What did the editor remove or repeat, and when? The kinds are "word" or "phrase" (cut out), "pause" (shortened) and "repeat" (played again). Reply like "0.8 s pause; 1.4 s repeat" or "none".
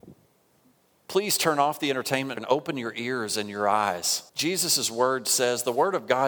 2.4 s word; 4.3 s pause